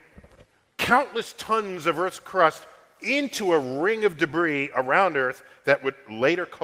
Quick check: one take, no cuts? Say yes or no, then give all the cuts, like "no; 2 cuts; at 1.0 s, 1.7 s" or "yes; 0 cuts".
yes; 0 cuts